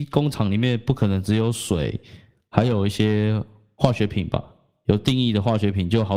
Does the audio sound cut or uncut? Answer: uncut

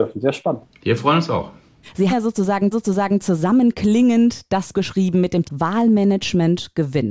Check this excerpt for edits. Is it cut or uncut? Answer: cut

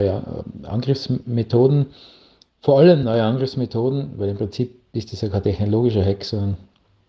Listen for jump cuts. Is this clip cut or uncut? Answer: uncut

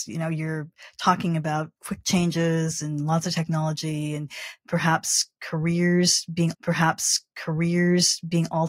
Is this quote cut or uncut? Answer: cut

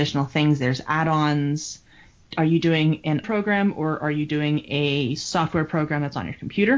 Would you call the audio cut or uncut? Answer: cut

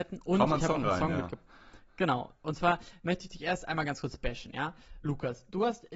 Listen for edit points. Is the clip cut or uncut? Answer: uncut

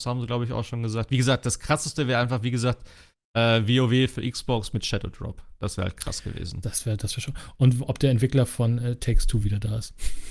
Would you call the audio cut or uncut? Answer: uncut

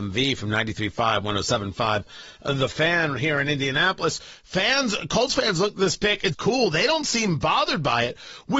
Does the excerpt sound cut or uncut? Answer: cut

